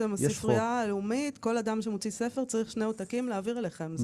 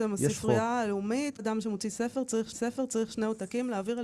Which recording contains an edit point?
second; 2 cuts; at 1.4 s, 2.5 s

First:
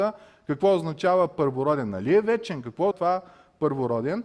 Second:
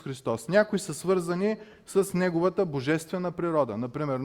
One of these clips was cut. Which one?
first; 1 cut; at 2.9 s

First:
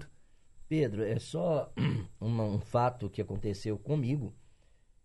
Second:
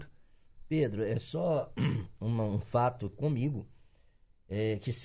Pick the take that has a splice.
second; 1 cut; at 3.1 s

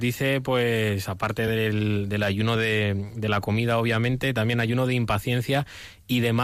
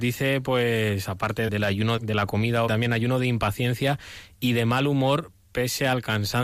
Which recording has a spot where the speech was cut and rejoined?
second; 3 cuts; at 1.5 s, 2.0 s, 2.7 s

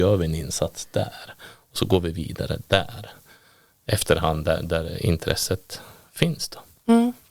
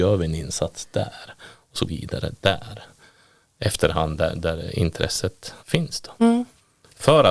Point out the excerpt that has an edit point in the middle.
second; 3 cuts; at 1.9 s, 5.6 s, 6.2 s

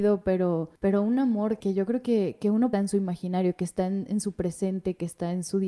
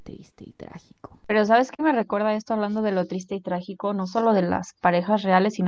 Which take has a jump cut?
first; 2 cuts; at 1.6 s, 2.7 s

